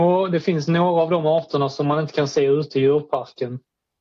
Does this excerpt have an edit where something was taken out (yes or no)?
no